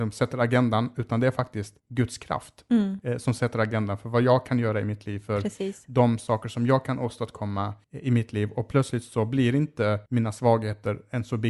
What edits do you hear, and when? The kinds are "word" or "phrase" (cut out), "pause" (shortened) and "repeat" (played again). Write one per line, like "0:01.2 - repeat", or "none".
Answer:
0:01.8 - pause
0:07.8 - pause
0:10.1 - pause